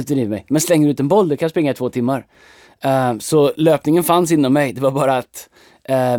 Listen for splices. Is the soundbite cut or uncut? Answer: uncut